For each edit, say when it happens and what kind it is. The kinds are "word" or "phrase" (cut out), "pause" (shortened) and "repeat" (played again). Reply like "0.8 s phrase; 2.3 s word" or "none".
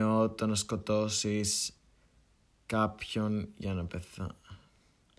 none